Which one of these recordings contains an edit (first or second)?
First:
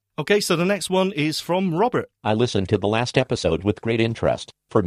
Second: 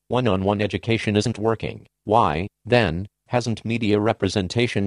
first